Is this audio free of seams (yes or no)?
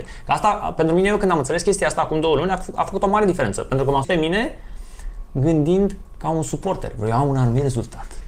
no